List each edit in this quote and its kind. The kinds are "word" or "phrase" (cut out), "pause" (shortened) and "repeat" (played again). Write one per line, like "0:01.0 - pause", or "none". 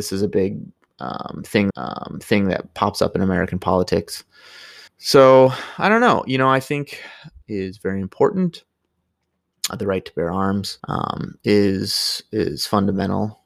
0:01.7 - repeat
0:04.9 - pause
0:07.4 - phrase
0:09.7 - word
0:10.8 - pause